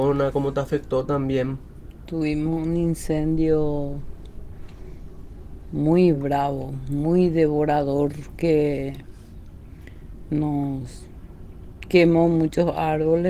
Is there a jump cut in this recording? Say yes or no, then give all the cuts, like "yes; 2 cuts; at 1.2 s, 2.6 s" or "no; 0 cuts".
no; 0 cuts